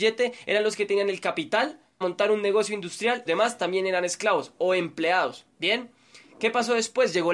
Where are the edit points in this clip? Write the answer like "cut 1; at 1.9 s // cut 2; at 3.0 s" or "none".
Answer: cut 1; at 2.0 s // cut 2; at 3.3 s